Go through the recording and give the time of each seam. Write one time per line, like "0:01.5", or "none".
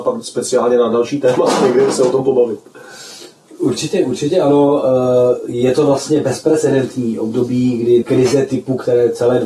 0:08.0

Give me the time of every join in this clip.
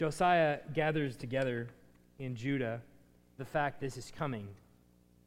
0:01.2
0:03.4
0:03.8

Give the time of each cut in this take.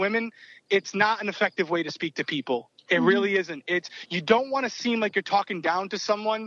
none

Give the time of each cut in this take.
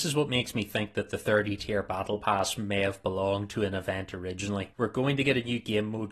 0:04.7

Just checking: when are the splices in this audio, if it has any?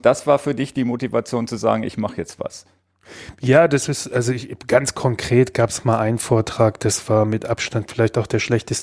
none

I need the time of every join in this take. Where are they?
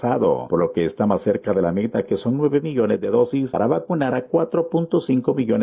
none

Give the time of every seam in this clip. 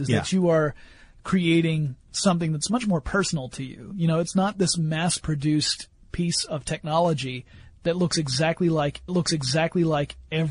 0:09.1

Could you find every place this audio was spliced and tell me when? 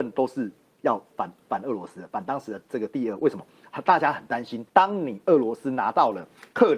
0:04.7

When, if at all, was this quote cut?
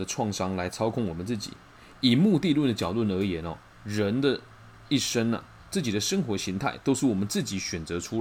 none

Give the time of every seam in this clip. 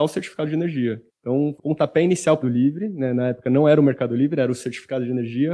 0:01.1
0:01.6
0:02.4

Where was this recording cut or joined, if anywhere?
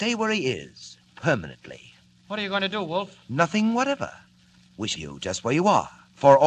0:04.9

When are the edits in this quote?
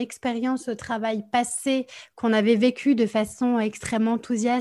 none

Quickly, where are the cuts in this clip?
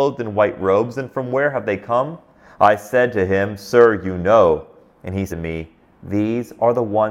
0:05.3

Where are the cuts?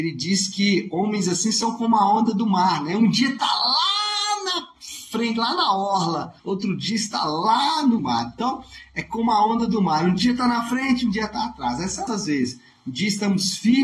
0:06.4
0:08.0
0:12.1

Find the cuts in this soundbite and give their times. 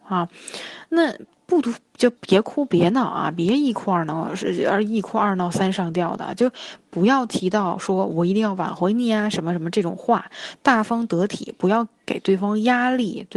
0:02.2

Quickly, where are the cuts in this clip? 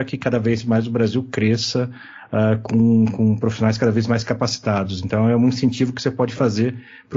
none

